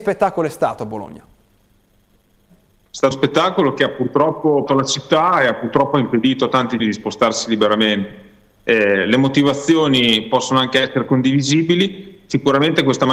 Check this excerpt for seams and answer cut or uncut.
cut